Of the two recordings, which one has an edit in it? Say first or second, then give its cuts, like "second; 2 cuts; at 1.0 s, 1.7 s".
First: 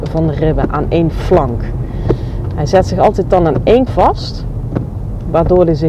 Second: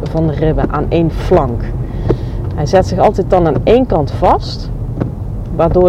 first; 1 cut; at 3.9 s